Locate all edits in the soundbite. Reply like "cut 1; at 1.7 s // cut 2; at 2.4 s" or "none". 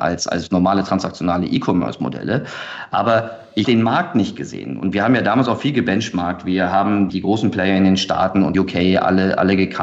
cut 1; at 3.6 s // cut 2; at 7.1 s // cut 3; at 8.5 s

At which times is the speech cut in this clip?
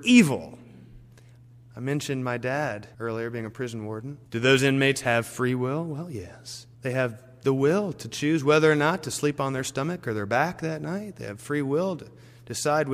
cut 1; at 2.9 s // cut 2; at 4.3 s // cut 3; at 6.7 s

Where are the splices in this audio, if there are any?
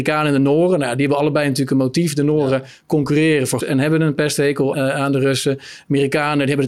cut 1; at 3.6 s // cut 2; at 4.7 s

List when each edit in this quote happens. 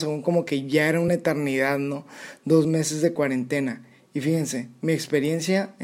none

